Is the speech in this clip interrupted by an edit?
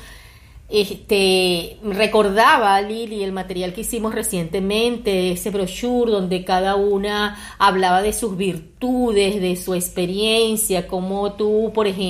no; 0 cuts

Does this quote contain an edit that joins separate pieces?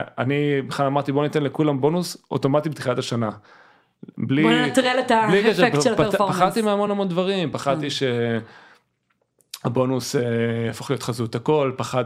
no; 0 cuts

